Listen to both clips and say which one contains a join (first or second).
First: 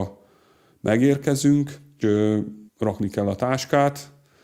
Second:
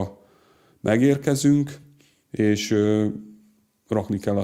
first